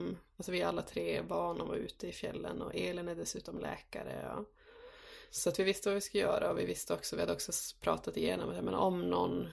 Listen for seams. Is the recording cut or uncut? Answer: cut